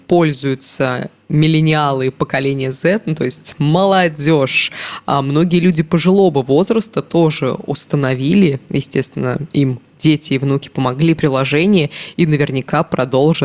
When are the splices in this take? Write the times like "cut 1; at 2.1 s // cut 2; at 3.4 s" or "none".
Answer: none